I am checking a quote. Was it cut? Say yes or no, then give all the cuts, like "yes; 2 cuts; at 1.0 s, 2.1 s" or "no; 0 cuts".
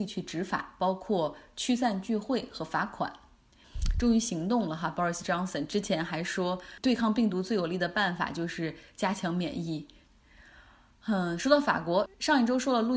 no; 0 cuts